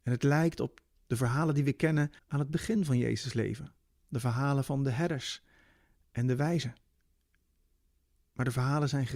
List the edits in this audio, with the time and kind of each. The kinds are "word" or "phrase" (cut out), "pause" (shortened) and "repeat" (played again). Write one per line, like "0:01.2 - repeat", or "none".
0:02.2 - pause